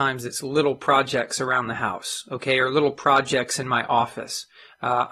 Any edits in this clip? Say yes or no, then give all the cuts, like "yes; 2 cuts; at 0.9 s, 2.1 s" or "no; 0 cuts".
no; 0 cuts